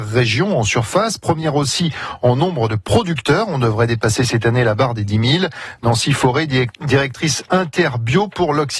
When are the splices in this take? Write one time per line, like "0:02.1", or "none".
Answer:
none